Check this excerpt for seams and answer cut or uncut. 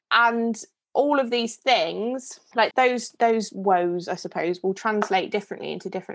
cut